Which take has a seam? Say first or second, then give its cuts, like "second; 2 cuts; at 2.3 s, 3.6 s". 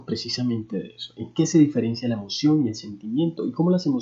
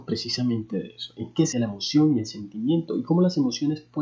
second; 1 cut; at 1.5 s